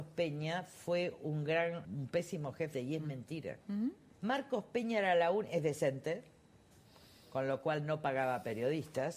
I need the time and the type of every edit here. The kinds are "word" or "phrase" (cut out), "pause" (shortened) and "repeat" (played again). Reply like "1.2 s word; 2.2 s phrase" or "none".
1.8 s word; 2.7 s phrase; 3.6 s pause; 4.1 s pause